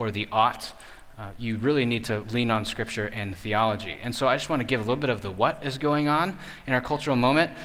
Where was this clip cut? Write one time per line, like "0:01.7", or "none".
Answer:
none